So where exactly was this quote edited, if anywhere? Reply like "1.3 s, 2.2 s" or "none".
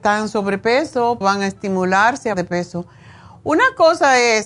1.2 s, 2.3 s